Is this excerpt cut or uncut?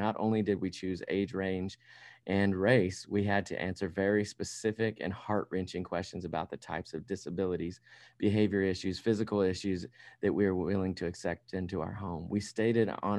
uncut